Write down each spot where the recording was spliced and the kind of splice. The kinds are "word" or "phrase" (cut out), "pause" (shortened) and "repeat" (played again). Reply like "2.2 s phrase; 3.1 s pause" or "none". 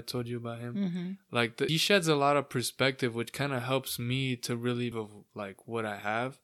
1.7 s word; 4.9 s phrase